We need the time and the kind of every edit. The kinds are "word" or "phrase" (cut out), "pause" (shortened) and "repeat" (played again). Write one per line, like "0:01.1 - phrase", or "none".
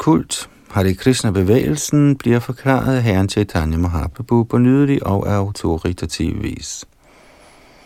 none